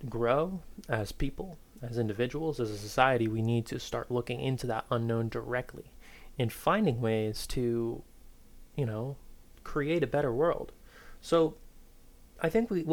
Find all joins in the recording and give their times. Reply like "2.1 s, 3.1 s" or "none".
none